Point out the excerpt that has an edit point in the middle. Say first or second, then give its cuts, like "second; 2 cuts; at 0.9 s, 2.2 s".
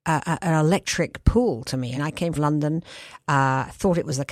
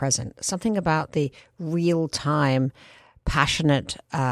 first; 2 cuts; at 2.0 s, 2.4 s